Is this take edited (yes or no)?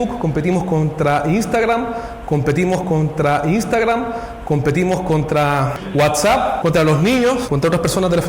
yes